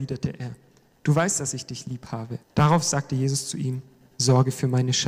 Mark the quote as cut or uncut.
cut